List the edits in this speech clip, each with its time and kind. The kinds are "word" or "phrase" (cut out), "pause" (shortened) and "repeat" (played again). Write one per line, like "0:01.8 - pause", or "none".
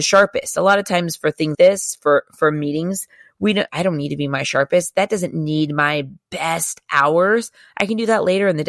0:01.5 - word
0:03.7 - word